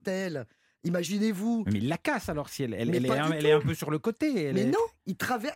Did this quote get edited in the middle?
no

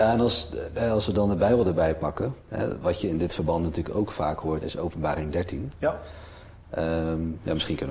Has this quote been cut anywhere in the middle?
yes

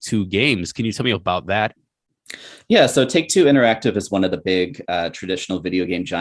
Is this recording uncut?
yes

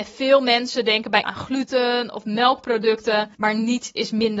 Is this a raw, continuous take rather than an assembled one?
no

